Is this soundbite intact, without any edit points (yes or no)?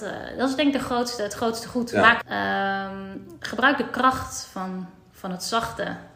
no